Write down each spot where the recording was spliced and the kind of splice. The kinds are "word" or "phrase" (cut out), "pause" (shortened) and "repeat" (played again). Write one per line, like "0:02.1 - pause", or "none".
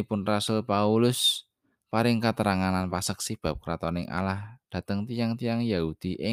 none